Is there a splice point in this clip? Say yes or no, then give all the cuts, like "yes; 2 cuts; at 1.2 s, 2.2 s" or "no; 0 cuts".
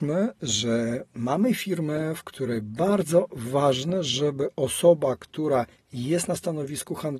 no; 0 cuts